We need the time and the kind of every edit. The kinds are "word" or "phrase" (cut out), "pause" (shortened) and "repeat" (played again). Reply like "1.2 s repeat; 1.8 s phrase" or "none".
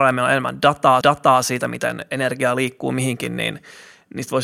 1.0 s repeat